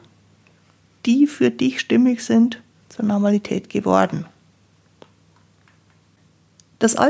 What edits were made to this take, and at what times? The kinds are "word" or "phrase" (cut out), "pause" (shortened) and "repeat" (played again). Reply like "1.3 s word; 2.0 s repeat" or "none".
2.8 s pause